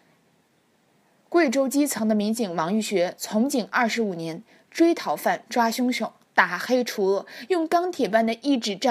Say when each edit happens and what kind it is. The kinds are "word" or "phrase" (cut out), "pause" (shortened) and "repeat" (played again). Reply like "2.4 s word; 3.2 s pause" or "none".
none

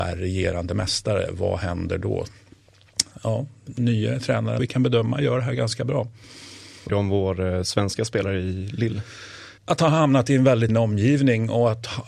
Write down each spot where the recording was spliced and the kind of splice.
4.6 s phrase; 6.9 s word; 9.6 s pause; 10.7 s word

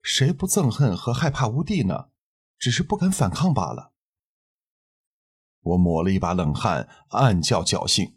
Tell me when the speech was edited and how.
none

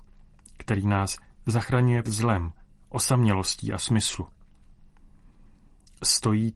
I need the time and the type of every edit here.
2.0 s word; 3.8 s word

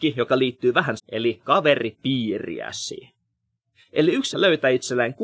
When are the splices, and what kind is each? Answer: 1.0 s word; 1.4 s word; 4.3 s phrase

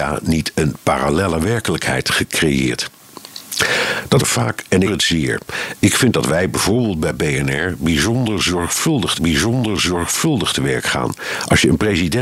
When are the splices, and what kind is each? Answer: 4.2 s word; 4.8 s phrase; 9.1 s repeat

